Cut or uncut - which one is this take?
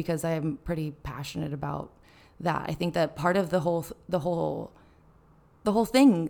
uncut